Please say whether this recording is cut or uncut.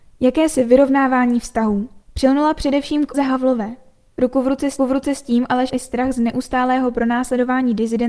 cut